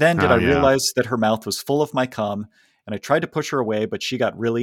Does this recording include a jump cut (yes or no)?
no